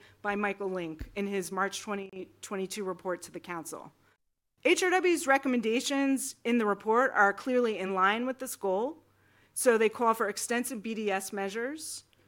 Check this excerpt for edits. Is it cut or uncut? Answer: uncut